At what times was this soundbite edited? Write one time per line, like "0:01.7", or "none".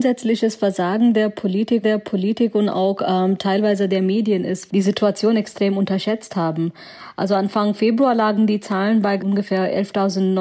0:01.8
0:04.7
0:09.2